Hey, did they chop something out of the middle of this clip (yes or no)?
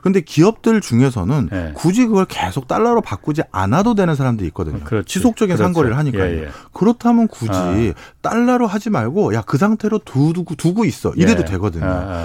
no